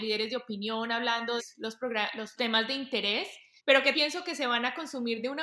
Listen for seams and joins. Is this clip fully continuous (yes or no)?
no